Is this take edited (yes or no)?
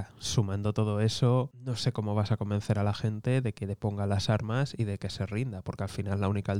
no